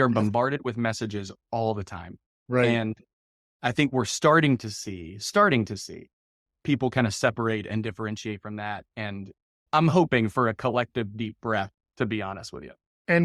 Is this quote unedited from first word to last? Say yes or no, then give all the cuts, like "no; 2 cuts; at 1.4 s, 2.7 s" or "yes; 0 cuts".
yes; 0 cuts